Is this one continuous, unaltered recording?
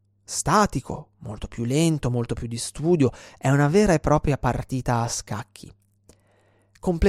yes; 0 cuts

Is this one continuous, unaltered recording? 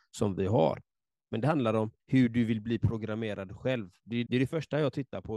no; 2 cuts; at 2.0 s, 4.3 s

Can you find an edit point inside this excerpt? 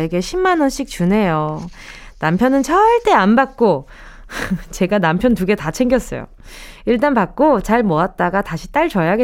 no; 0 cuts

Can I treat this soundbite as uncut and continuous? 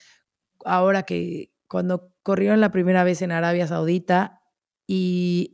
no; 1 cut; at 2.2 s

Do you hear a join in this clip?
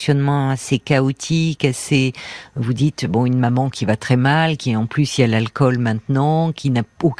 no; 0 cuts

